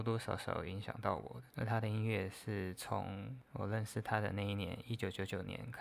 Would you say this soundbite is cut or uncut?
cut